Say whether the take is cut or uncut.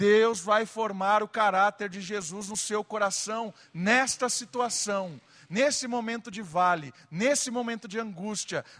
uncut